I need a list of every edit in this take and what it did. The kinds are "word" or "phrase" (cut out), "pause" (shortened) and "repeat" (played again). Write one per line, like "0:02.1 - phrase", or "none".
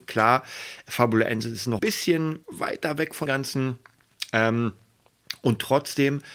0:01.8 - word
0:02.4 - pause
0:03.3 - word